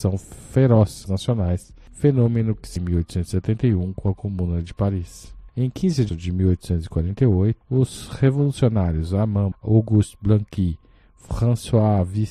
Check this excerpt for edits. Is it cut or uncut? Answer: cut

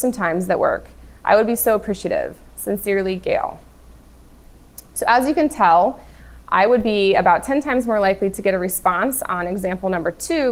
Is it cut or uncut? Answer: uncut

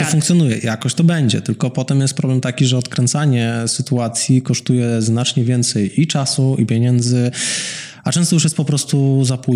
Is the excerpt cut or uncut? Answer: uncut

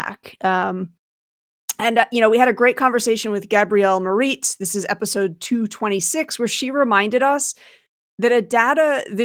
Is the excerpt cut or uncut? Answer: uncut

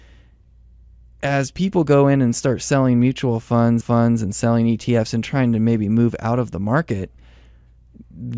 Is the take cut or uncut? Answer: cut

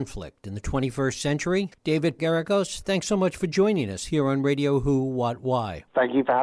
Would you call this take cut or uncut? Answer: cut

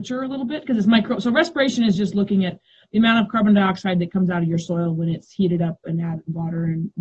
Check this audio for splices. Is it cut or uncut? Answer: uncut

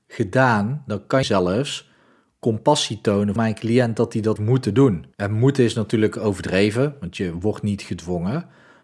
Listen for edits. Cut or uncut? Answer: cut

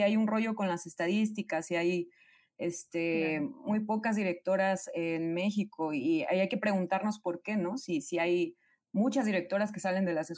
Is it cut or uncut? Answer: uncut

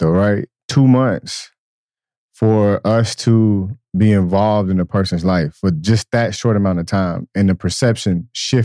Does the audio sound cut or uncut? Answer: uncut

